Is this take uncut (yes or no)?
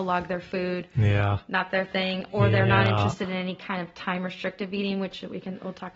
yes